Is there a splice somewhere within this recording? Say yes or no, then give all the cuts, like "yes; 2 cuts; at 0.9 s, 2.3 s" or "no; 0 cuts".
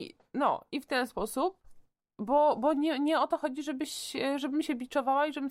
no; 0 cuts